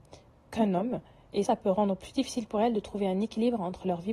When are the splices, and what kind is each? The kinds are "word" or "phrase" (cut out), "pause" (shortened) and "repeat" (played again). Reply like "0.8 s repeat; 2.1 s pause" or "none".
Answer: 1.4 s word